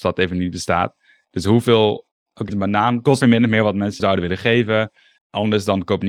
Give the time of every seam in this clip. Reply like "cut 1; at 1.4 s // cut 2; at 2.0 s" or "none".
cut 1; at 2.5 s // cut 2; at 3.2 s // cut 3; at 4.0 s